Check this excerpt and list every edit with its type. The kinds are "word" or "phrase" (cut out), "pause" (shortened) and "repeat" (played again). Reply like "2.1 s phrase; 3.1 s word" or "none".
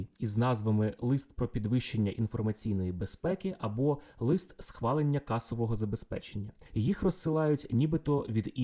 none